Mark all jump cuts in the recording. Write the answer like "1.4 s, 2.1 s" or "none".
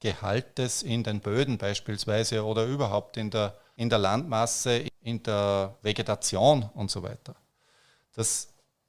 none